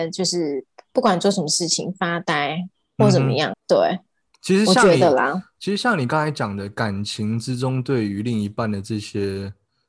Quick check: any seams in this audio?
yes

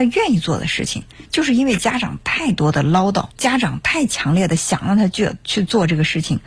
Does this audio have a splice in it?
yes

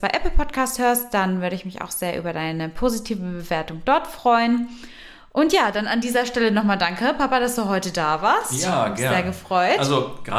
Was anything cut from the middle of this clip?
no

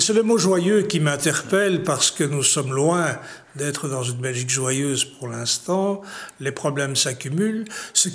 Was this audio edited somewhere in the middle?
no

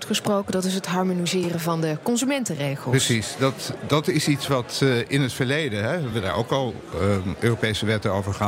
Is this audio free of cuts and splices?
yes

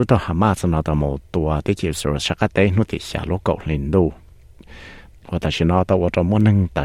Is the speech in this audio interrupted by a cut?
no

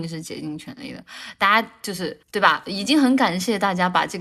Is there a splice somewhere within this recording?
yes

